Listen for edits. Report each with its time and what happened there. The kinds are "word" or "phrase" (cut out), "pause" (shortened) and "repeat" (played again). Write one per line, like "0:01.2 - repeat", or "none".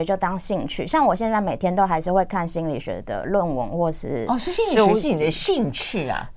none